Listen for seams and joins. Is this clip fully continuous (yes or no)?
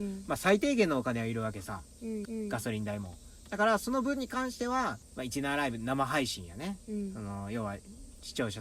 no